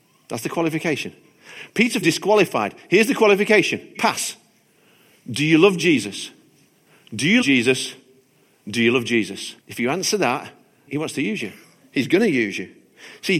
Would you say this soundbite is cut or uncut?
cut